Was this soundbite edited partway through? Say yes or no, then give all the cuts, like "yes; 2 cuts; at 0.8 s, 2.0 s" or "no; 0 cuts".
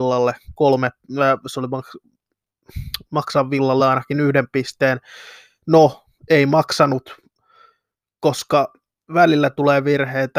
no; 0 cuts